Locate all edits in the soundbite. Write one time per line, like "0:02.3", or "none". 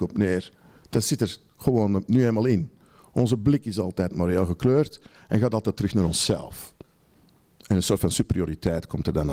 none